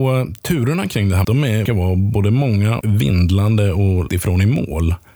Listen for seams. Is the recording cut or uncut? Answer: cut